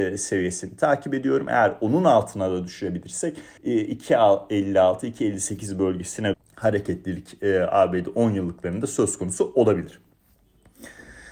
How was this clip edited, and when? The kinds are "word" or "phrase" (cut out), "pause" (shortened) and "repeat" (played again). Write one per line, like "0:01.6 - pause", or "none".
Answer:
0:03.6 - pause
0:06.3 - phrase

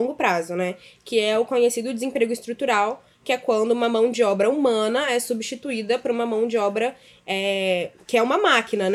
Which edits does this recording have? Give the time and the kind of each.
none

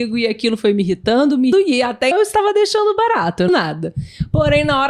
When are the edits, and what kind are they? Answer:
0:01.5 - word
0:02.1 - word
0:03.5 - phrase

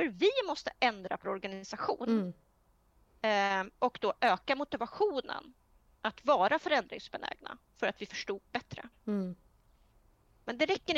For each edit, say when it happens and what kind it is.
0:01.2 - word

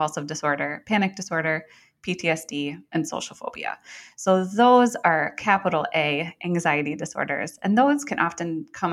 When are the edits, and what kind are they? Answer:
none

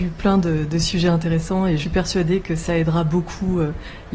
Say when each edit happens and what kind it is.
0:01.8 - word

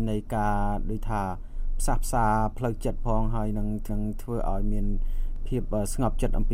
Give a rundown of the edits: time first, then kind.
0:03.9 - repeat

